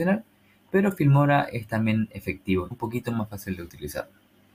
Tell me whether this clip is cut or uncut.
cut